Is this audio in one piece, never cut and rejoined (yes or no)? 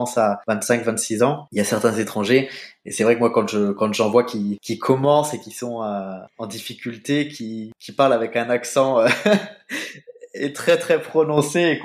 yes